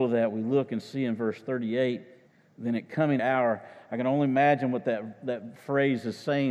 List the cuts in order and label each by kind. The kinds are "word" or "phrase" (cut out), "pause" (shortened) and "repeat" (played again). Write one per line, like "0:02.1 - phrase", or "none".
0:02.3 - pause
0:03.2 - phrase